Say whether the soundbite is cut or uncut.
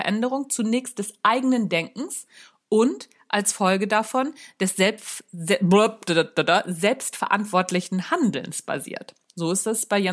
uncut